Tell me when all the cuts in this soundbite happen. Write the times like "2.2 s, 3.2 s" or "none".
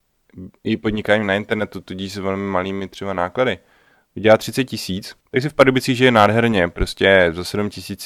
5.2 s